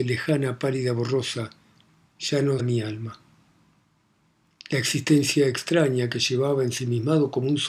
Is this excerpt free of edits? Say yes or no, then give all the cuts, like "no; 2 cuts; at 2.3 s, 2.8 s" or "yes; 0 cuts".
no; 1 cut; at 2.6 s